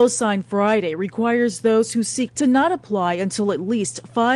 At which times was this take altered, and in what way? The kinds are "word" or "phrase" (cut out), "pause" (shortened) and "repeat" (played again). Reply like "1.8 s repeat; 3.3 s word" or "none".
2.3 s word